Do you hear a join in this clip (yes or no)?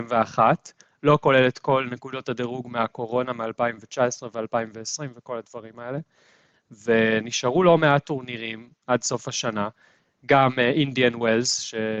no